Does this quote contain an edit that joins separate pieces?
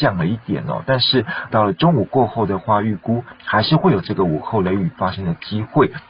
yes; 1 cut; at 1.5 s

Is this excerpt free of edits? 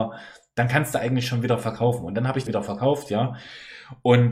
no; 1 cut; at 2.5 s

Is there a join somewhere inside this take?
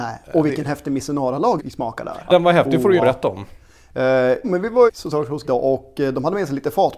yes; 6 cuts; at 1.6 s, 2.3 s, 3.0 s, 4.4 s, 4.9 s, 5.4 s

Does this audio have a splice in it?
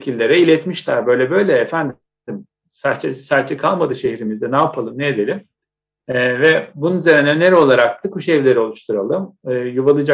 no; 0 cuts

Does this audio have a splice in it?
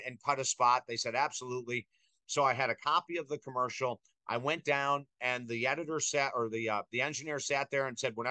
no; 0 cuts

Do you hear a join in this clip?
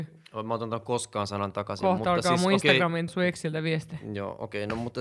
yes; 1 cut; at 3.1 s

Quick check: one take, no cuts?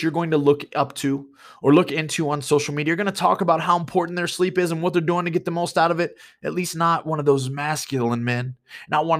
yes; 0 cuts

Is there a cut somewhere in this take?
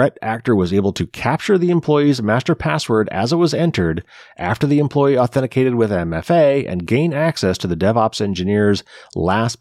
no; 0 cuts

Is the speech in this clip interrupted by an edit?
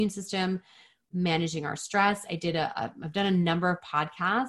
no; 0 cuts

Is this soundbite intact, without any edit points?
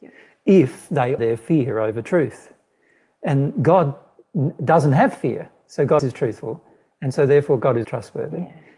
no; 3 cuts; at 1.2 s, 6.0 s, 7.8 s

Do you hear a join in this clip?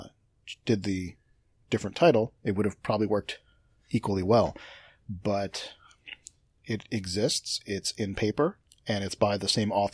no; 0 cuts

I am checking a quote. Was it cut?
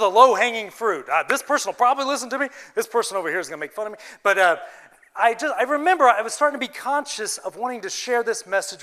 no; 0 cuts

